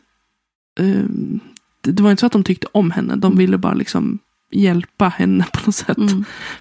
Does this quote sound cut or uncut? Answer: uncut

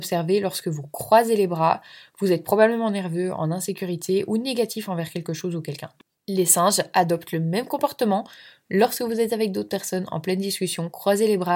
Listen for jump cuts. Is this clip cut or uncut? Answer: uncut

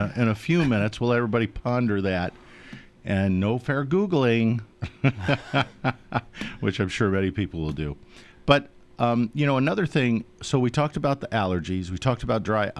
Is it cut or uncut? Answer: cut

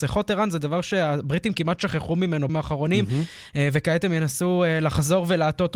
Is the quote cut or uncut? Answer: cut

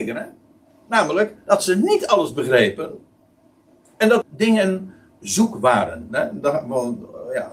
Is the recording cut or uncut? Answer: cut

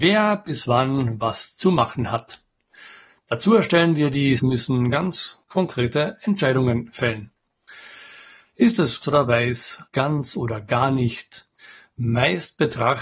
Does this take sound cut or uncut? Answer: cut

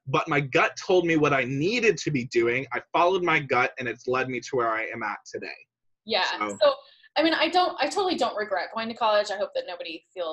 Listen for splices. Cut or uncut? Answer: uncut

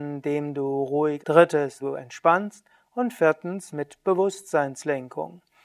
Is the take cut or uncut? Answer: cut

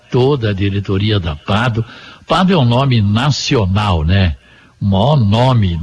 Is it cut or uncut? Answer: uncut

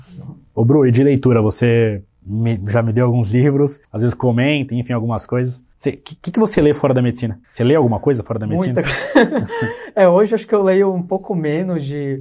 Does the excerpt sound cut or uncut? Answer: cut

